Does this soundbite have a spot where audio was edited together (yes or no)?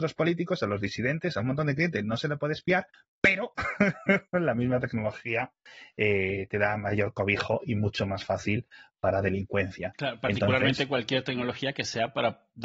no